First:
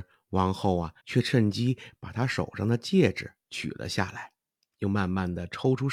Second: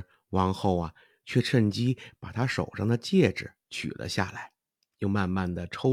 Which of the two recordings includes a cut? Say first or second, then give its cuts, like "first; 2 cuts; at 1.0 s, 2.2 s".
first; 1 cut; at 1.0 s